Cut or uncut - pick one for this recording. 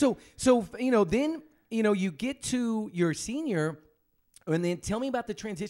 uncut